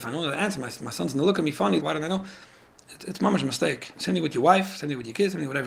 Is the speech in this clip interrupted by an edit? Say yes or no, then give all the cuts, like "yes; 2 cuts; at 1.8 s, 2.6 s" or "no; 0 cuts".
yes; 1 cut; at 1.8 s